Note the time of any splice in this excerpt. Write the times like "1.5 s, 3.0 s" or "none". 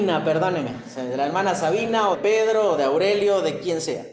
2.1 s